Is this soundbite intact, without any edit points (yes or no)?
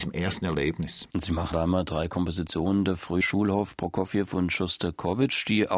no